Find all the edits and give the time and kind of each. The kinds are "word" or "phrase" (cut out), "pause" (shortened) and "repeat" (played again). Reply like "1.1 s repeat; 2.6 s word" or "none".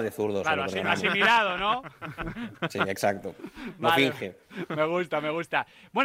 none